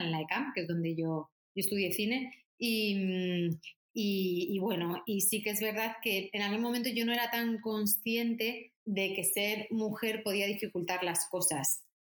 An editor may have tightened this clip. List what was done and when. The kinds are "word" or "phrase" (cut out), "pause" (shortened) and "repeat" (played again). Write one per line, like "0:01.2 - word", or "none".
0:08.8 - pause